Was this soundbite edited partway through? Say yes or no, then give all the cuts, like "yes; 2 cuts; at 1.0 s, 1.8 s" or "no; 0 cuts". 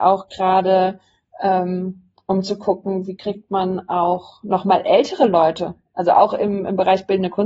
no; 0 cuts